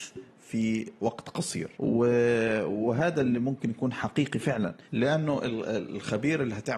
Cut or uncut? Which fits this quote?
cut